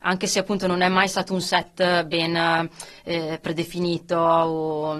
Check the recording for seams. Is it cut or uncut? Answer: uncut